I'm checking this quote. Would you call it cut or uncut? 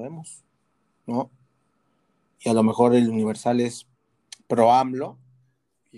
uncut